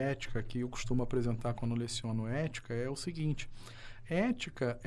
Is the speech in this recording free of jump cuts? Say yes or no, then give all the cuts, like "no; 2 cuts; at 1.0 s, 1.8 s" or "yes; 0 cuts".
yes; 0 cuts